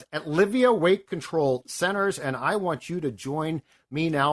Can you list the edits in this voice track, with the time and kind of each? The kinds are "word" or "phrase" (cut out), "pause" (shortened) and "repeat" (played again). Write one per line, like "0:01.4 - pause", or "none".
none